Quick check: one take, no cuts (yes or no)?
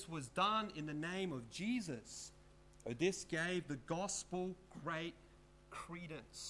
yes